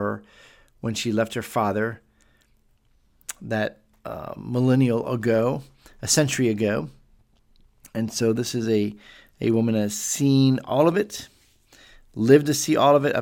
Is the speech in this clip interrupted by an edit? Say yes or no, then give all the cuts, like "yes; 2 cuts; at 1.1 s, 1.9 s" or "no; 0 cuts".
no; 0 cuts